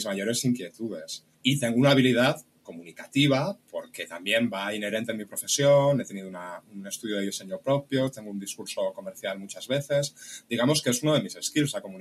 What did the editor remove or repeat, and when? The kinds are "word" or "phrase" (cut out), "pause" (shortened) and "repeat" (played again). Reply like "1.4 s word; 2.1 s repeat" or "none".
1.3 s pause